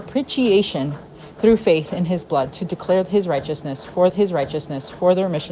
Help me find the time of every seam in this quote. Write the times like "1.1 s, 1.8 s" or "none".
4.1 s

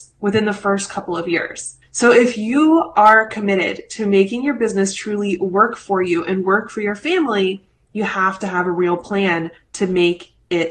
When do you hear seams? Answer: 1.8 s

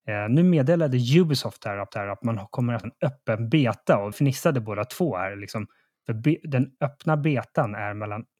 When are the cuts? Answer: 1.9 s, 2.8 s, 4.1 s

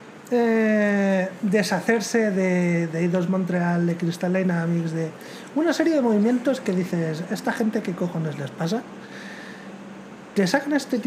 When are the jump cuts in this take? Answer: none

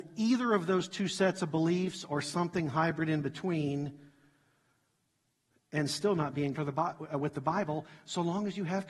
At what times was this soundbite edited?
6.6 s

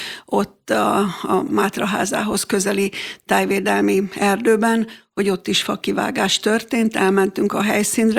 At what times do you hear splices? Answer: 1.5 s

